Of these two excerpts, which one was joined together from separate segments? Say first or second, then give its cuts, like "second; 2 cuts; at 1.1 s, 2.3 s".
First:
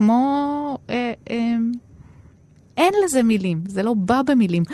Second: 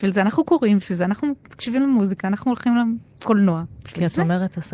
second; 2 cuts; at 1.4 s, 2.2 s